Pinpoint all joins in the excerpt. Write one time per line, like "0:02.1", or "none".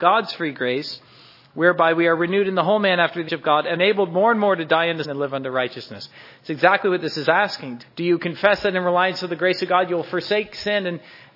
0:03.3
0:03.8
0:05.0
0:07.8